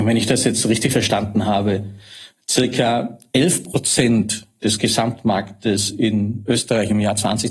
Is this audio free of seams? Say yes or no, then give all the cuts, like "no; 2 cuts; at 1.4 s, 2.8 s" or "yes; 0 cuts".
yes; 0 cuts